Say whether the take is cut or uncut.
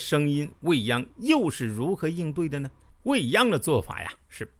cut